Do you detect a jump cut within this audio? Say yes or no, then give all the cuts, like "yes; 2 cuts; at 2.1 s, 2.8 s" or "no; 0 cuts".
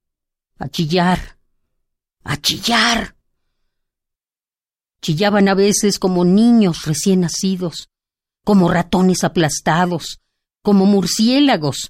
no; 0 cuts